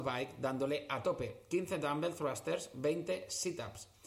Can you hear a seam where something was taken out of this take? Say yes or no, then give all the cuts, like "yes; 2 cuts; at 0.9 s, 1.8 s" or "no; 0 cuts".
no; 0 cuts